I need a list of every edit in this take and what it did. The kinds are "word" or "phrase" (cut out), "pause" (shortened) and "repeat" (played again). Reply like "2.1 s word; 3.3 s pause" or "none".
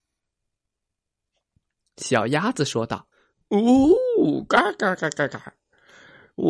3.1 s pause